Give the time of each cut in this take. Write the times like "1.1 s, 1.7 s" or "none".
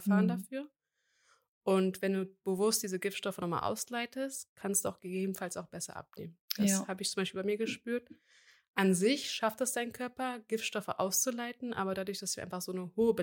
none